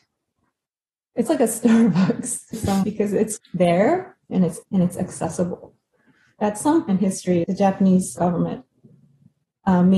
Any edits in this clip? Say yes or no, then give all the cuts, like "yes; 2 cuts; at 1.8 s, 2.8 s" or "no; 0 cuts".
yes; 9 cuts; at 1.3 s, 2.5 s, 2.8 s, 3.4 s, 4.6 s, 6.4 s, 6.9 s, 7.4 s, 8.2 s